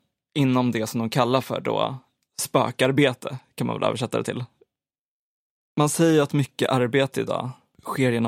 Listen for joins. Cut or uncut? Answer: uncut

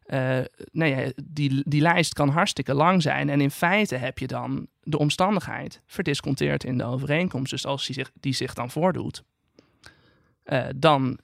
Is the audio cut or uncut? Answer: cut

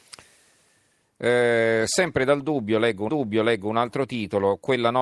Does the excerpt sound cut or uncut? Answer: cut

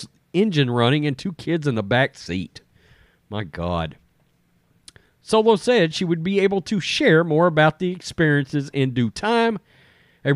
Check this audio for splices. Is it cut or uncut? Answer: uncut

